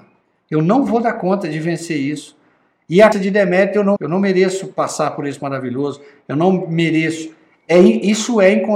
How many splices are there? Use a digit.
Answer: 3